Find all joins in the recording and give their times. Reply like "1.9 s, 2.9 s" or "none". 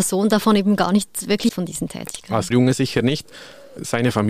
1.5 s, 2.5 s

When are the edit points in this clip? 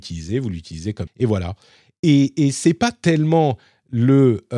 1.1 s

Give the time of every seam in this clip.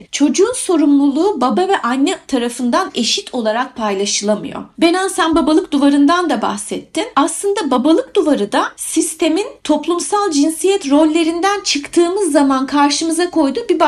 none

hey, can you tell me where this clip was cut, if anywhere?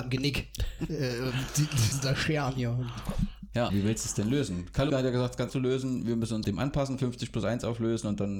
1.9 s, 3.7 s, 4.9 s, 5.5 s, 6.4 s

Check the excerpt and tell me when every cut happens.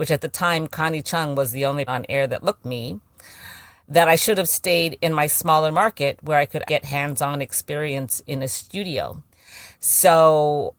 1.9 s, 2.6 s, 6.7 s

